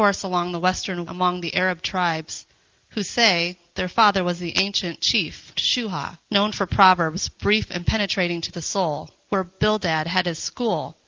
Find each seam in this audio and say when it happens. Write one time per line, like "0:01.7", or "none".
0:01.1
0:05.6
0:06.2